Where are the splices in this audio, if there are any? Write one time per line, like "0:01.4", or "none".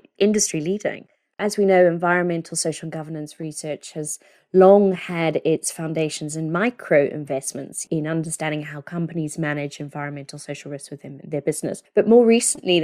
none